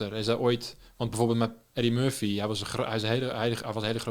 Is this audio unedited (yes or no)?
yes